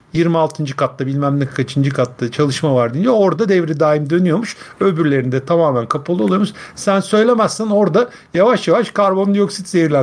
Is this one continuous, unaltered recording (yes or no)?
yes